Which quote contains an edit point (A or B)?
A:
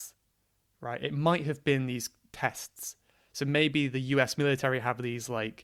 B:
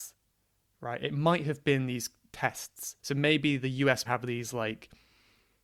B